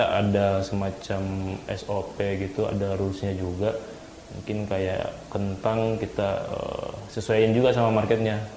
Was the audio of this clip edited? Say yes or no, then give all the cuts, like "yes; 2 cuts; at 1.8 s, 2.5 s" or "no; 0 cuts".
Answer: no; 0 cuts